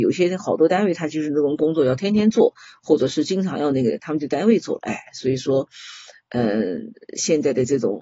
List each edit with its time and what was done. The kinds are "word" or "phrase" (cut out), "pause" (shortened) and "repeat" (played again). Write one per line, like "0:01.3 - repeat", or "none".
none